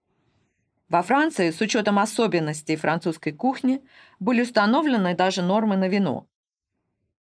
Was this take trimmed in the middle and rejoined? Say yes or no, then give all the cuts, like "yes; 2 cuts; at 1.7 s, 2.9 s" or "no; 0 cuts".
no; 0 cuts